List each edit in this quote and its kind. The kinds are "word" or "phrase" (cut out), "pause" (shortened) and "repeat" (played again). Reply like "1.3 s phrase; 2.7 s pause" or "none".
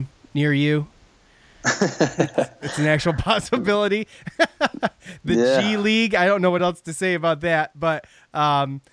none